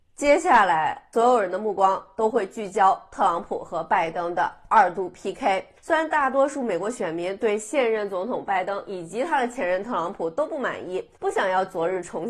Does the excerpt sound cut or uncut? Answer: cut